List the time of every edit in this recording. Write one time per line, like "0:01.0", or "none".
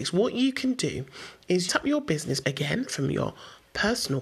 0:01.7
0:02.4
0:02.9